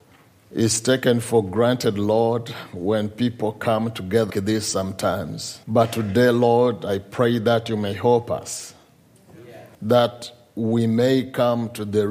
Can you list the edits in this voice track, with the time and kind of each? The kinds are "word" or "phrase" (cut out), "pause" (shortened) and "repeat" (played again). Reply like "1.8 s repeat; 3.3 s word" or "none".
4.3 s word; 5.6 s pause; 9.7 s pause